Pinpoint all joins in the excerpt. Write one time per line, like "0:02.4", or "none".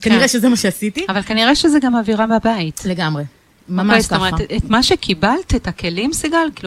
none